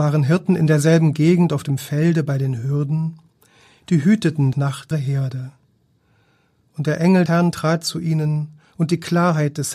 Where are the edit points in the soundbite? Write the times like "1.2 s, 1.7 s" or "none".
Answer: 4.5 s, 4.9 s, 7.3 s

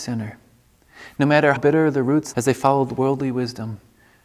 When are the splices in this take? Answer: 1.6 s, 2.3 s

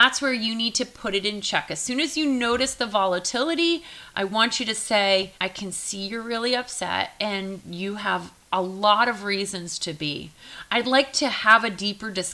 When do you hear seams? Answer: 5.4 s

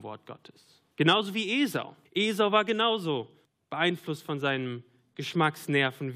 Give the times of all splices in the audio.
0.9 s, 2.0 s, 3.4 s

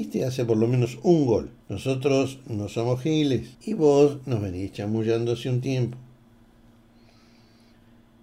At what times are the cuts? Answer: 1.6 s, 3.5 s

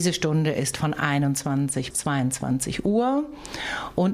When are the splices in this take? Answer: 1.9 s

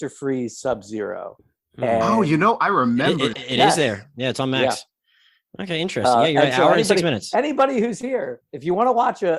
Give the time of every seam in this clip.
3.3 s

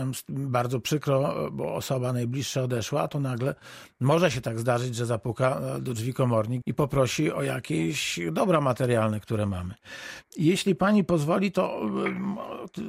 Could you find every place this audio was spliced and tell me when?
6.6 s

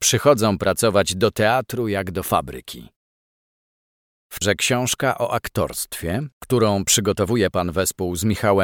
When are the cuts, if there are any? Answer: 4.4 s

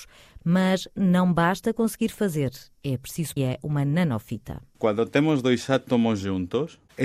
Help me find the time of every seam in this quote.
3.4 s

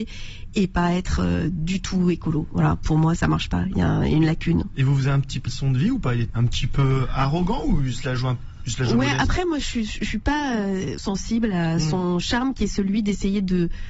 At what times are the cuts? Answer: 3.2 s, 5.5 s, 6.3 s, 11.0 s

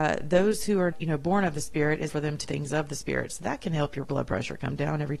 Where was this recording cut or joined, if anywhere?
0.9 s, 2.1 s, 2.4 s

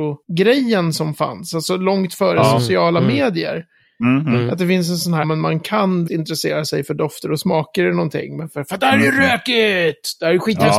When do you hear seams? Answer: 5.2 s, 6.1 s

